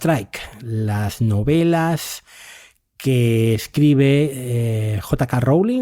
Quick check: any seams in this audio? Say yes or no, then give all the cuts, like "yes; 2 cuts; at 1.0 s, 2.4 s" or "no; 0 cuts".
no; 0 cuts